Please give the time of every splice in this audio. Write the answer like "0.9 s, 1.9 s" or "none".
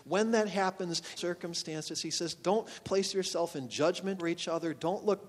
1.2 s, 4.2 s